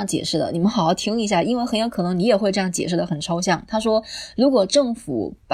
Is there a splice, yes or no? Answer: no